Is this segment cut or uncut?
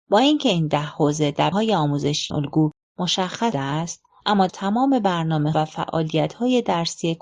cut